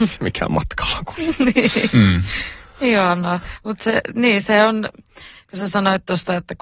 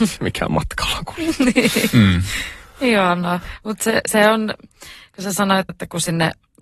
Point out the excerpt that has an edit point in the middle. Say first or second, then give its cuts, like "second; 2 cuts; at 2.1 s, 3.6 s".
second; 2 cuts; at 4.1 s, 5.7 s